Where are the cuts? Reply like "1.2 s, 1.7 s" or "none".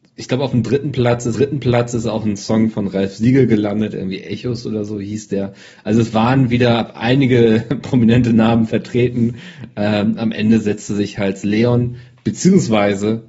1.3 s